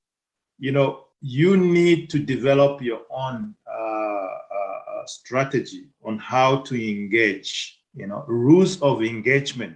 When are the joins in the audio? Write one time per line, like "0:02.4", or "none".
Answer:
0:01.1
0:07.8